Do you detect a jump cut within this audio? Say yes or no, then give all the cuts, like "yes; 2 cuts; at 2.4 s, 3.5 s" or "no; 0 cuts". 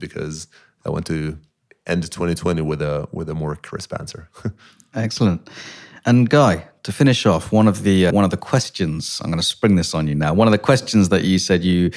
yes; 1 cut; at 8.1 s